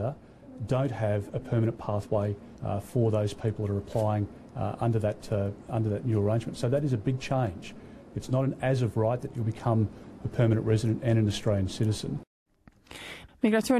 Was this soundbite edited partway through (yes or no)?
yes